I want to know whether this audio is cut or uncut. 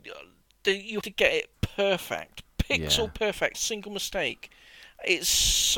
cut